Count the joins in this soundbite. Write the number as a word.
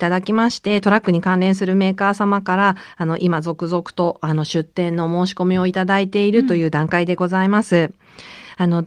zero